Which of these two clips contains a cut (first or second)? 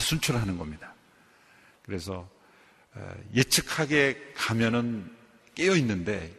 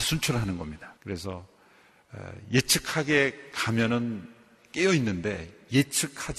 second